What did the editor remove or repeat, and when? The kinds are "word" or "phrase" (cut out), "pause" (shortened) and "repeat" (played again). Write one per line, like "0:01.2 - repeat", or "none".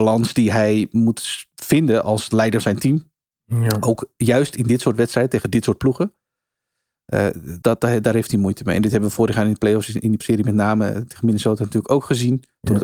0:02.6 - word
0:07.6 - word
0:10.2 - word